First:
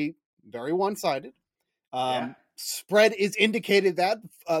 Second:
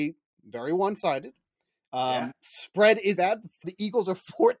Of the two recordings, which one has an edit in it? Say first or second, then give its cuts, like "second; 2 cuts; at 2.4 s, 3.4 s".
second; 3 cuts; at 2.3 s, 3.2 s, 3.6 s